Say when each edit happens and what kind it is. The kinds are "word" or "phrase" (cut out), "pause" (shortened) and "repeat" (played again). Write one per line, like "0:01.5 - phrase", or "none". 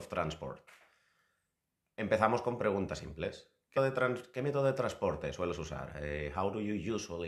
0:03.8 - word